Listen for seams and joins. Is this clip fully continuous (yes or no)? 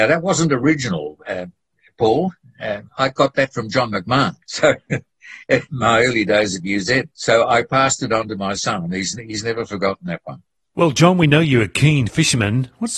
no